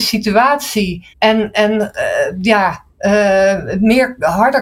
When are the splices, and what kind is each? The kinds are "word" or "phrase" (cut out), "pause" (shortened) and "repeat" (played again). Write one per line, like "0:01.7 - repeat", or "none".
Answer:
0:01.1 - pause